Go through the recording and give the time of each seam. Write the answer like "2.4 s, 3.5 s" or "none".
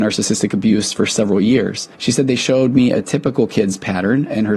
1.9 s